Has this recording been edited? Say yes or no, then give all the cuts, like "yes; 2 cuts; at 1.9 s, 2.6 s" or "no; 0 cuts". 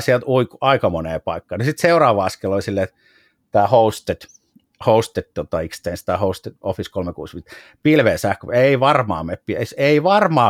no; 0 cuts